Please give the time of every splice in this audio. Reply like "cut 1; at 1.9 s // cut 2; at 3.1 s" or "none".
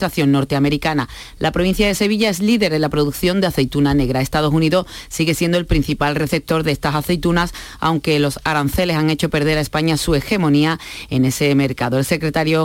none